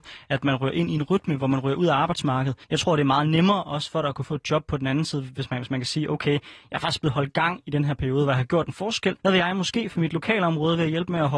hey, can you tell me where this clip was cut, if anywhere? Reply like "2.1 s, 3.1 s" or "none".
2.6 s, 9.2 s